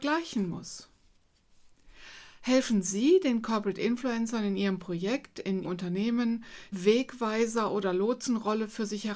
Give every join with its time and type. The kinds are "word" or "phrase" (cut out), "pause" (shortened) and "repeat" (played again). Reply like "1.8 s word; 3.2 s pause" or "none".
5.6 s word; 6.7 s word